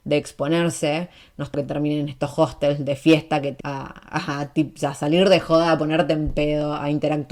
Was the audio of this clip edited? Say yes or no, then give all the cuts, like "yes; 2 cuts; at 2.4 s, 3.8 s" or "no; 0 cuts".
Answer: yes; 2 cuts; at 1.5 s, 3.6 s